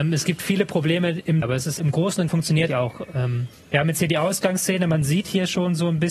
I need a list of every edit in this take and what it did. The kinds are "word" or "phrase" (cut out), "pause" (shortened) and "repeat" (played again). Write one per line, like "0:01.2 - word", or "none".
0:01.4 - word
0:01.8 - word
0:02.3 - word
0:02.7 - phrase
0:03.5 - pause